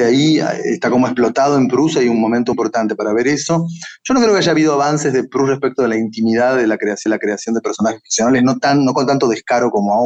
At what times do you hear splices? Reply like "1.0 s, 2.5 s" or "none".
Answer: 2.5 s, 7.1 s